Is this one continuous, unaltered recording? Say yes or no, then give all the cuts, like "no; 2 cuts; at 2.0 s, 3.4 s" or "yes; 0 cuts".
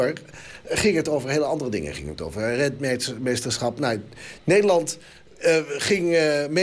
yes; 0 cuts